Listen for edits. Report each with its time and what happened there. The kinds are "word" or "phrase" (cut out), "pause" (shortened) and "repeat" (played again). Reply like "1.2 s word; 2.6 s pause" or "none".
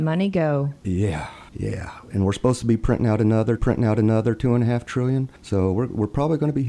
1.5 s pause; 3.6 s repeat; 5.4 s pause